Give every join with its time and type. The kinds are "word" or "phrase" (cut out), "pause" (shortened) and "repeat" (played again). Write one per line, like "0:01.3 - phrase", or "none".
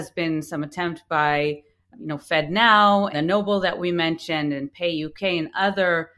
0:01.9 - word
0:03.1 - word